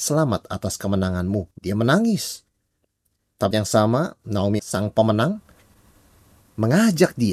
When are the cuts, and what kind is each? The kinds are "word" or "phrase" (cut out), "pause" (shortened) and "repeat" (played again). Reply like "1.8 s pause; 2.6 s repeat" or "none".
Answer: 1.5 s pause; 3.5 s word; 4.6 s word